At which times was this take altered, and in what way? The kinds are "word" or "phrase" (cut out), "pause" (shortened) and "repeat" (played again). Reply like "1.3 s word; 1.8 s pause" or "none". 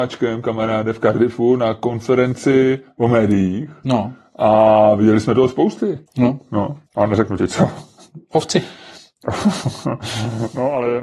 6.1 s pause; 6.9 s pause